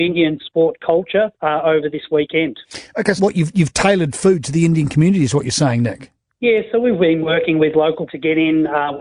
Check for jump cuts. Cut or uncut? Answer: cut